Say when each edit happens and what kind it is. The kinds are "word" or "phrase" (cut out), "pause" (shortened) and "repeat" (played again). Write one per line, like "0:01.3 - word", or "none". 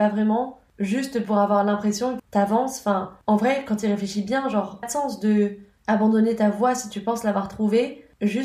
0:02.2 - word
0:04.8 - phrase